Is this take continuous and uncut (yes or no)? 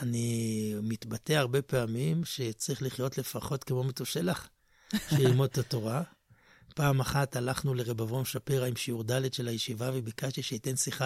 yes